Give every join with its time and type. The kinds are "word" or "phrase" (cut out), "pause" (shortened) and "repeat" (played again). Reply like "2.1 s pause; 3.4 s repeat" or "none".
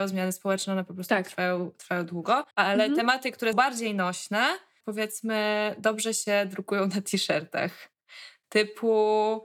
2.5 s pause; 3.5 s word; 4.8 s phrase